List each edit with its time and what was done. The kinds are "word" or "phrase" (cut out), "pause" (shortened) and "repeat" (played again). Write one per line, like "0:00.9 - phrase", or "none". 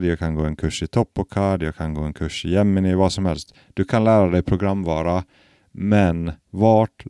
none